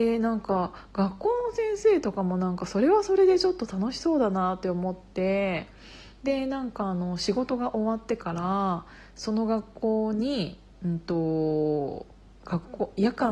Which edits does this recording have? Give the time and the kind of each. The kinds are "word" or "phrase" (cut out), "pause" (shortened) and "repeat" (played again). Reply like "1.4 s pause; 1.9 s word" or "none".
none